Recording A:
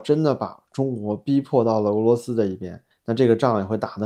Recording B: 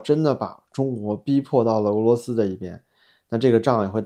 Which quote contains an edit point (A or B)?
A